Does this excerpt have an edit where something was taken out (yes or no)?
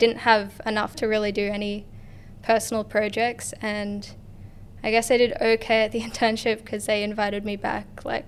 yes